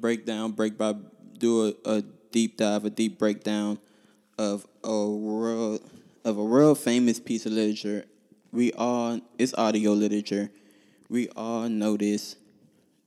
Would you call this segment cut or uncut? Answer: uncut